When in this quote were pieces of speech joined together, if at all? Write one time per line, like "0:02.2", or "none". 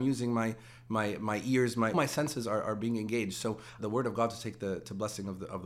0:01.9
0:03.8